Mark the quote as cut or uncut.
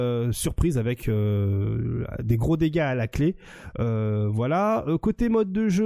uncut